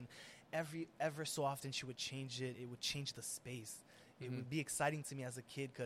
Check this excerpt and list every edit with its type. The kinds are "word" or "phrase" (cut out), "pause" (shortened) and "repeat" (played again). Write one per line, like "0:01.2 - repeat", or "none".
0:02.5 - word